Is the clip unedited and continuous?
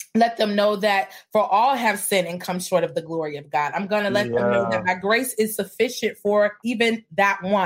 yes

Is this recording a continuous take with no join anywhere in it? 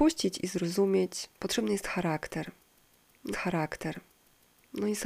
no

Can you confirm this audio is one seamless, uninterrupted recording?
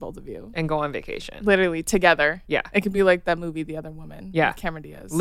yes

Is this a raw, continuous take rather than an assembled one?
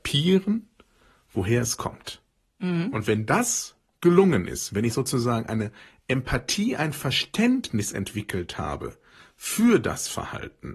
yes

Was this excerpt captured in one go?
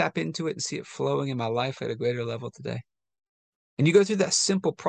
yes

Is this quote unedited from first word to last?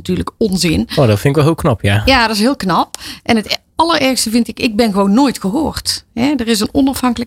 yes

